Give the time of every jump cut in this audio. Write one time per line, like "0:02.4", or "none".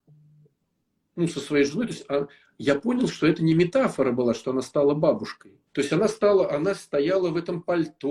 0:05.7